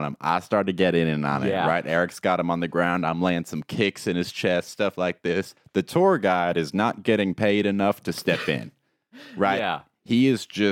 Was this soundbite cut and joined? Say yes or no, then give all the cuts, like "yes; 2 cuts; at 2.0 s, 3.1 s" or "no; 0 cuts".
no; 0 cuts